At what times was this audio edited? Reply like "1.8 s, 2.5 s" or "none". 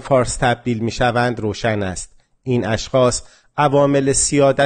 none